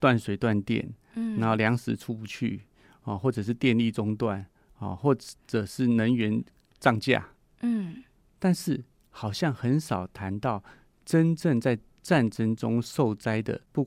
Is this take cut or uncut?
uncut